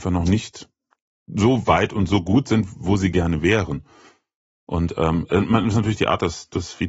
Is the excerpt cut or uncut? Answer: uncut